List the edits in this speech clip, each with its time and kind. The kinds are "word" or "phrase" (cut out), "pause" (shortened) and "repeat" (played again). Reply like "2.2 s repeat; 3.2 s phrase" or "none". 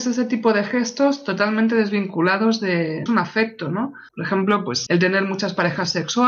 3.1 s phrase; 4.1 s pause; 4.9 s word